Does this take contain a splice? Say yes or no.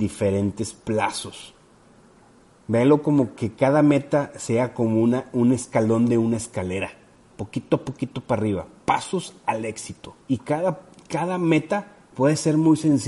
yes